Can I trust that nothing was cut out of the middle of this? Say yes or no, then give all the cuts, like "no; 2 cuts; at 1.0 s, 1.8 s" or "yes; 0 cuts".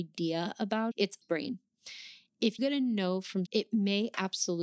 no; 4 cuts; at 0.9 s, 1.2 s, 2.6 s, 3.5 s